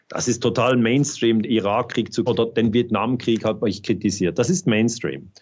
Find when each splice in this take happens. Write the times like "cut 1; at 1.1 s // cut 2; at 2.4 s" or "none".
cut 1; at 2.3 s